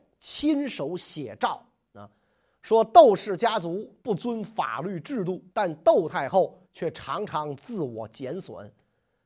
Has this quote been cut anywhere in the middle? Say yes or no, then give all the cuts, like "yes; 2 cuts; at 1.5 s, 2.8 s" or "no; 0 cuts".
yes; 3 cuts; at 4.0 s, 5.5 s, 6.6 s